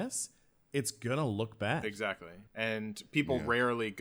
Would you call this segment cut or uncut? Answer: cut